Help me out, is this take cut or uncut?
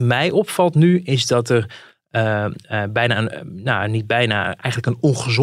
uncut